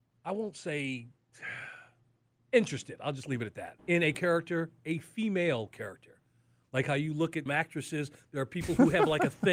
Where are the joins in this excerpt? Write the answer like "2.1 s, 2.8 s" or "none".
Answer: 3.8 s, 4.1 s, 5.7 s, 7.5 s